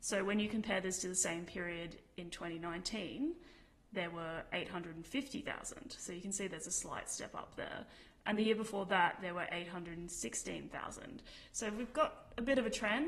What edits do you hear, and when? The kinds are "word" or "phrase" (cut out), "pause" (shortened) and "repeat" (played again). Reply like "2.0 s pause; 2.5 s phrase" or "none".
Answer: none